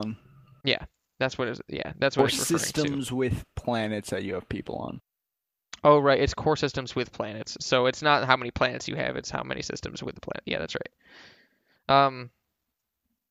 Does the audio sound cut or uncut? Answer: uncut